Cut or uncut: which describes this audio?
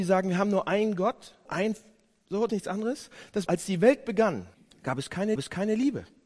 cut